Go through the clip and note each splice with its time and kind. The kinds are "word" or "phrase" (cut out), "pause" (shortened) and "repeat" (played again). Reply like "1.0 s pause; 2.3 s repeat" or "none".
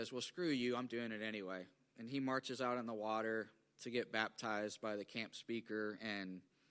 none